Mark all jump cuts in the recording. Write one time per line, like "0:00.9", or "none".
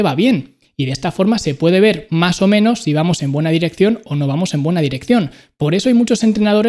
none